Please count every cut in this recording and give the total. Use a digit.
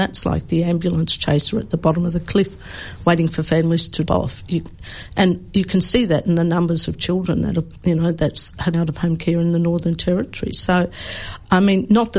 2